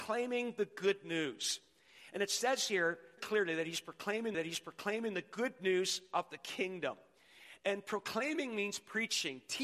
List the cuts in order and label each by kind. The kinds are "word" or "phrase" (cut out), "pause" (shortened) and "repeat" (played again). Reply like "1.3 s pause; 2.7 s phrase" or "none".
3.2 s word; 4.3 s repeat